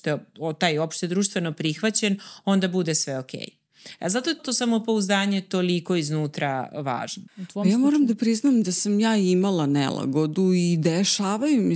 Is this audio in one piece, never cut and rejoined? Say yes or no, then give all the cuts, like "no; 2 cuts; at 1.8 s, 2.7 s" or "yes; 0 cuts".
no; 2 cuts; at 4.4 s, 7.3 s